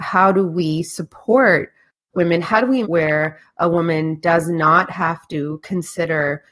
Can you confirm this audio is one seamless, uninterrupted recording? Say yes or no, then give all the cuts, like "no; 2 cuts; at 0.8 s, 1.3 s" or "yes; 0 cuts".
no; 1 cut; at 2.8 s